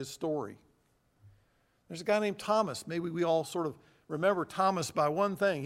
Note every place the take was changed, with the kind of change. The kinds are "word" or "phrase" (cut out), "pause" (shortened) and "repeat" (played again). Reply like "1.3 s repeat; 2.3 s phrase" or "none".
none